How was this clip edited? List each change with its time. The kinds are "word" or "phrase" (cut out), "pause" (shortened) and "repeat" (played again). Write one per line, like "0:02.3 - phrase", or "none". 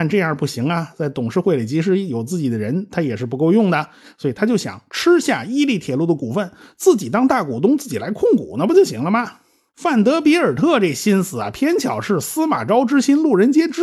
none